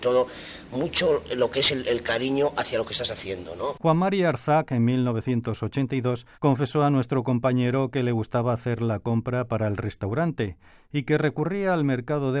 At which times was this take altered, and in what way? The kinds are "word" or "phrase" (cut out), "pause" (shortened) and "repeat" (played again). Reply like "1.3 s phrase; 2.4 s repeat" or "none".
1.8 s word; 6.3 s pause

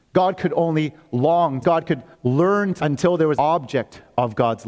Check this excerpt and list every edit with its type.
1.6 s phrase; 2.1 s pause; 2.8 s word; 3.4 s word

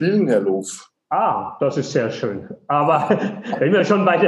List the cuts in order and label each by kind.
none

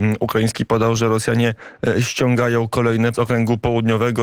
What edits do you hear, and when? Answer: 3.1 s word

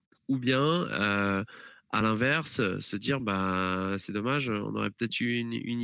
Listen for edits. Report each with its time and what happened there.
none

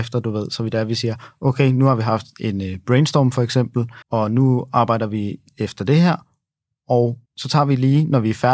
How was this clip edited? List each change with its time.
4.0 s pause; 7.3 s pause

